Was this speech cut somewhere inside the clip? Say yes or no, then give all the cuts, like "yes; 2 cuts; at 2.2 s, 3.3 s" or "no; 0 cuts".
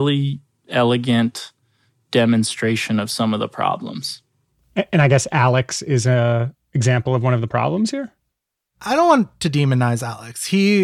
yes; 1 cut; at 6.6 s